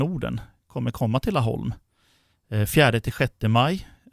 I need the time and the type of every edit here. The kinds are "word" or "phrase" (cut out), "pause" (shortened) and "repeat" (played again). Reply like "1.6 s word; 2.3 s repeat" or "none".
none

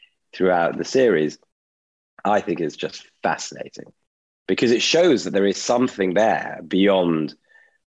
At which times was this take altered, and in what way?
none

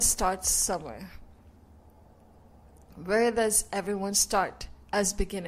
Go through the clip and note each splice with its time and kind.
none

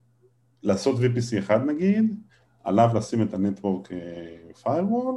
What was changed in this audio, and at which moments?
none

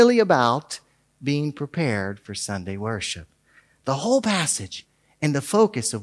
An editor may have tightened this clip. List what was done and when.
none

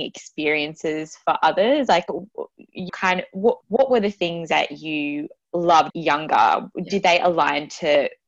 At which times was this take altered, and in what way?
2.9 s word; 3.6 s pause; 5.9 s phrase

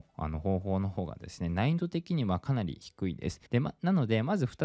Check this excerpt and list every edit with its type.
3.5 s pause

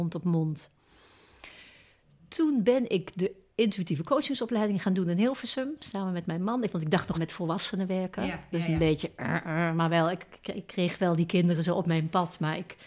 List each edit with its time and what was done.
7.1 s phrase

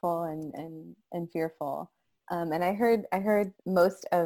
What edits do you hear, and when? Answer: none

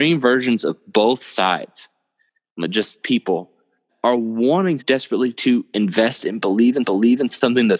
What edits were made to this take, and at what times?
3.0 s word; 3.9 s word; 4.8 s word; 6.8 s repeat

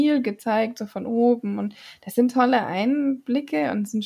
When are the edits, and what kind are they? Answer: none

